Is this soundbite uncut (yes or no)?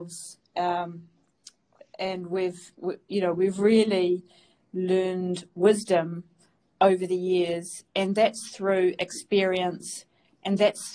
yes